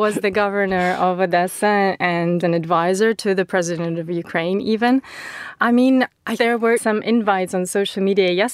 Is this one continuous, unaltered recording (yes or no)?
no